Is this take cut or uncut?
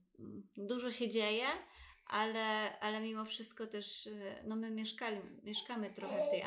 uncut